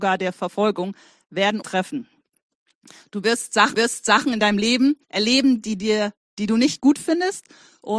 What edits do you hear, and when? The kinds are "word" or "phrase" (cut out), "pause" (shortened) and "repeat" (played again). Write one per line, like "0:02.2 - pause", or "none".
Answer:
0:01.6 - word
0:03.7 - repeat
0:05.0 - pause